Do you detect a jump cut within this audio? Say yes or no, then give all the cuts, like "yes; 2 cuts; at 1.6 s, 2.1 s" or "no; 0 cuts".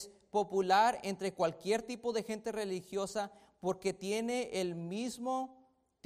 no; 0 cuts